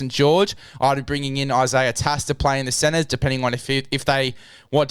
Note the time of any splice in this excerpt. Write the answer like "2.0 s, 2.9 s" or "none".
none